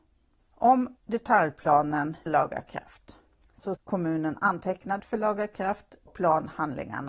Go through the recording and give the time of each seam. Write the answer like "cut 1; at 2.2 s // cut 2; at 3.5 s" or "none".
cut 1; at 2.3 s // cut 2; at 3.8 s // cut 3; at 5.0 s // cut 4; at 6.1 s